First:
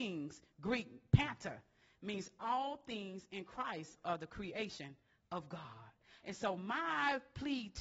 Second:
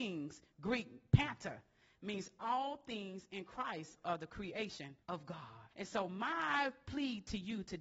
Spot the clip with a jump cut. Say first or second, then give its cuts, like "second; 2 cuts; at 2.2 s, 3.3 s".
second; 2 cuts; at 5.0 s, 5.7 s